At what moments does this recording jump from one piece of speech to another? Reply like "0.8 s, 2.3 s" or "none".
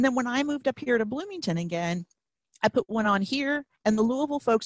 none